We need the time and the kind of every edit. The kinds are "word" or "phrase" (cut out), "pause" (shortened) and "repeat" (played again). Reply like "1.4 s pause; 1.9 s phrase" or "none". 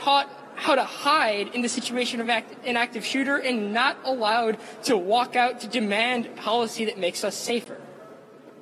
none